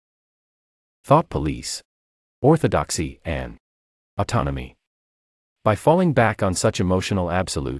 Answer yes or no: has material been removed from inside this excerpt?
no